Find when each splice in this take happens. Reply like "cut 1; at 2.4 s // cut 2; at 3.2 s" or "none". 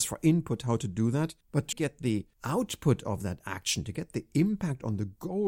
cut 1; at 1.4 s // cut 2; at 1.7 s // cut 3; at 2.3 s